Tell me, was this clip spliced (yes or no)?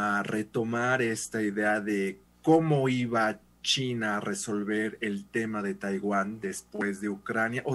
yes